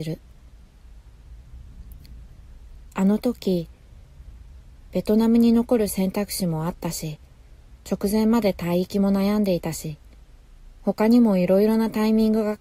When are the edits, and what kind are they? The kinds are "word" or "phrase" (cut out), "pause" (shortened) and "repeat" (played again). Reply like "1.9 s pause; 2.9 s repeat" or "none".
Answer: 10.7 s pause